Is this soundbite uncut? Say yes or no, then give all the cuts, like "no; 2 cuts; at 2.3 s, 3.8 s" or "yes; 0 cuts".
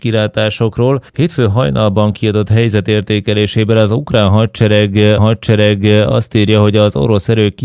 no; 2 cuts; at 1.1 s, 5.2 s